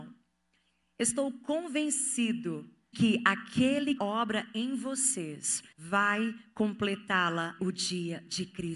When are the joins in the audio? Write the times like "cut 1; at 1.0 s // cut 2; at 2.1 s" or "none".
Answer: cut 1; at 2.9 s // cut 2; at 4.0 s // cut 3; at 5.7 s // cut 4; at 7.6 s